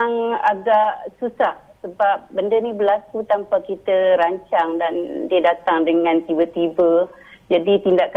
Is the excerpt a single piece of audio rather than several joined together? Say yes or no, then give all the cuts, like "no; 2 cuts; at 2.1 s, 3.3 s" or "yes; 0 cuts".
yes; 0 cuts